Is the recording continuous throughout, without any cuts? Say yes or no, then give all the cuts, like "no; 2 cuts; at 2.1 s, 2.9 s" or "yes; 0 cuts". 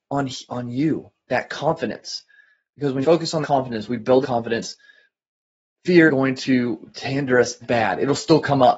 no; 5 cuts; at 3.0 s, 3.4 s, 4.2 s, 6.1 s, 7.6 s